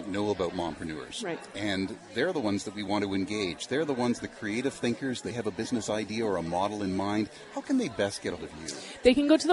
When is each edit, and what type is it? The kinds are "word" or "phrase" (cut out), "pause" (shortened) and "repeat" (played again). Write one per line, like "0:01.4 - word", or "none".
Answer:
0:05.3 - word
0:08.4 - word